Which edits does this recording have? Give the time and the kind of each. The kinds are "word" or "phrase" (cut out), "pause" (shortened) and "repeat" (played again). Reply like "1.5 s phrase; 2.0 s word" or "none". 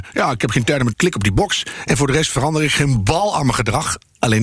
0.9 s phrase